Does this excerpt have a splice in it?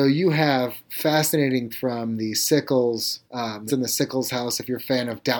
yes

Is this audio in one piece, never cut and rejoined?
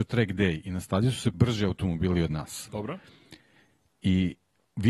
no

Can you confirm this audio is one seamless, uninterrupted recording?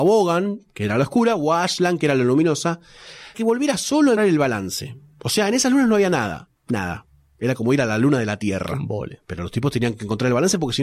no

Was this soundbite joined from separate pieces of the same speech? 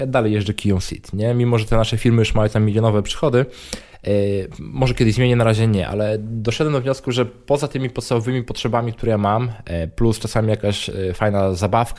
no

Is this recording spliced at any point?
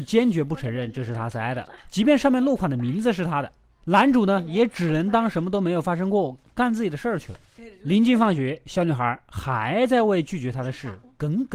no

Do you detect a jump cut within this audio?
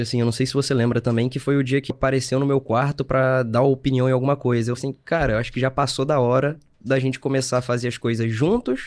yes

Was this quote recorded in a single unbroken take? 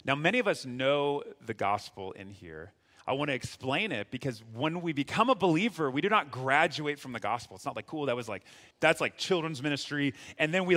no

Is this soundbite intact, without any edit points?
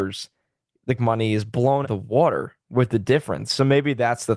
no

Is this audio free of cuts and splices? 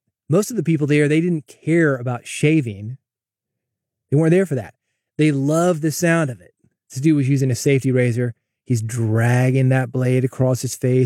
yes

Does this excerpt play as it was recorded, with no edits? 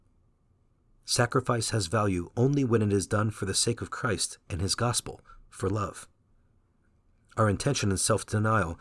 yes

